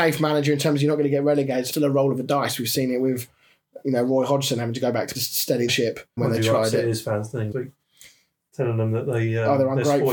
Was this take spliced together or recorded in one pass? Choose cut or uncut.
cut